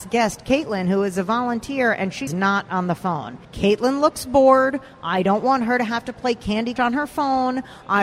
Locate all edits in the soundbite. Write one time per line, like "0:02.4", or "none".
0:02.3
0:03.4
0:06.8